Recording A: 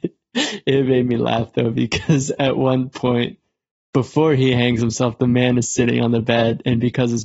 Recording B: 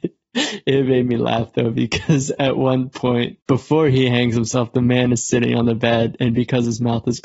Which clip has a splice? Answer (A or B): B